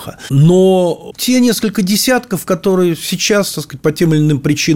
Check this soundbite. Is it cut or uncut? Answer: uncut